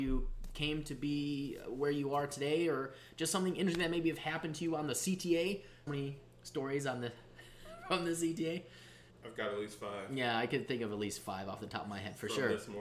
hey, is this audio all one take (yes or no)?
no